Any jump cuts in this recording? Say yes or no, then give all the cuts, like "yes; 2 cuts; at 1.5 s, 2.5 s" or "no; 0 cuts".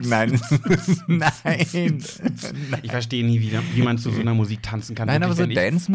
no; 0 cuts